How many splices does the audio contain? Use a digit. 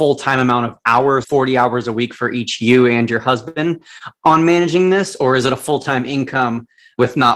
1